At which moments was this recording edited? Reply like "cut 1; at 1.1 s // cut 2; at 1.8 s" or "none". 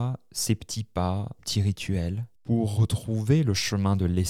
cut 1; at 1.4 s // cut 2; at 2.4 s